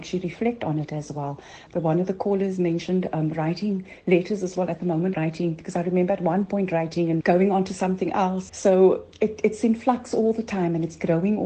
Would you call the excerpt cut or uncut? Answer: cut